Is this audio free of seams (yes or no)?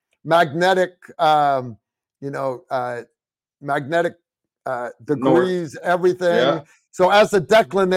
yes